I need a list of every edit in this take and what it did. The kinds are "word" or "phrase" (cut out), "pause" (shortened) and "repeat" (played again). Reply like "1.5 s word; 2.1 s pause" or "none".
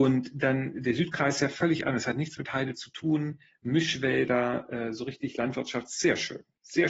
none